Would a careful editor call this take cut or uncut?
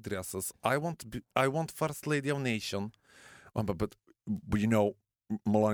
uncut